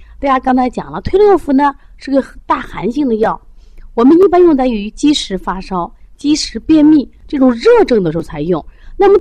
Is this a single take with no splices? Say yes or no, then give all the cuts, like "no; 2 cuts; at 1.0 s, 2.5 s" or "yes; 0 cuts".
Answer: no; 1 cut; at 2.4 s